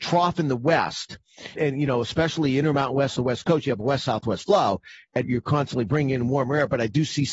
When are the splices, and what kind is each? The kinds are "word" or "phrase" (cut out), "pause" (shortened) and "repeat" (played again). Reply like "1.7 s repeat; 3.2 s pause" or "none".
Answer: 1.5 s word; 3.2 s phrase; 5.2 s word